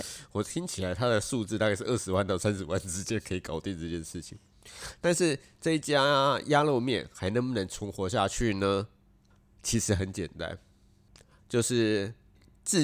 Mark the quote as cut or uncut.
uncut